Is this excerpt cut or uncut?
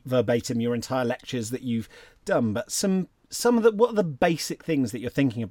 uncut